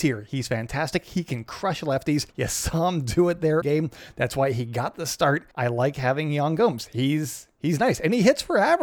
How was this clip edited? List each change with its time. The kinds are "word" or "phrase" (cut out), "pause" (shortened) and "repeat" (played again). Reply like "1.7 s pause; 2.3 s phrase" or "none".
2.3 s pause; 3.6 s phrase; 5.5 s pause